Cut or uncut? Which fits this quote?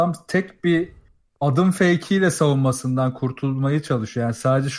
uncut